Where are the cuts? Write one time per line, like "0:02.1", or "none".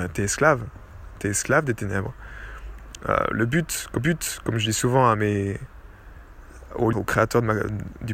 0:04.0
0:06.9